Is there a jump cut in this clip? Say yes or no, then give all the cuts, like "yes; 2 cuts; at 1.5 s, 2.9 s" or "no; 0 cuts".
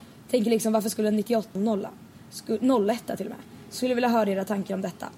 yes; 1 cut; at 1.6 s